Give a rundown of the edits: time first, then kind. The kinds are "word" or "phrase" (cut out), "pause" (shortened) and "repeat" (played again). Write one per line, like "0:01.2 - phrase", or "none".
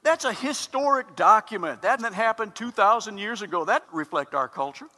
0:02.0 - word
0:03.8 - word